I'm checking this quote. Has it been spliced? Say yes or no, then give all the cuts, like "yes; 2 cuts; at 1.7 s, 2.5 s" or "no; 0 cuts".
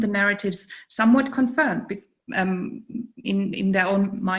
yes; 1 cut; at 3.2 s